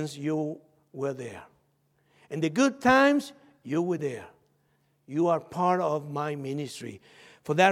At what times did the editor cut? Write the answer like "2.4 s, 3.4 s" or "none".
none